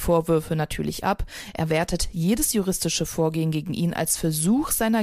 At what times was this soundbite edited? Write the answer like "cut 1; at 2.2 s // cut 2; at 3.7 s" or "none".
none